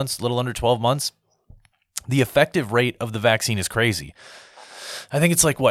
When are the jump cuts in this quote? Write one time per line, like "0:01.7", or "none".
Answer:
none